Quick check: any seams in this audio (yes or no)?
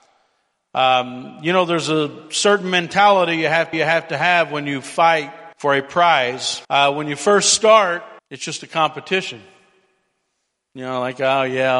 yes